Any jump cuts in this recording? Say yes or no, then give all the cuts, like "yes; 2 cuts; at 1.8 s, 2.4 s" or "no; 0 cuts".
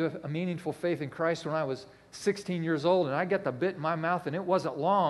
no; 0 cuts